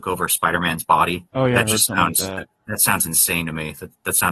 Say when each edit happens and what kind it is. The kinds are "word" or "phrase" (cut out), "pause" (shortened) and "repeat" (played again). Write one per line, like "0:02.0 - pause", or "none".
0:01.3 - pause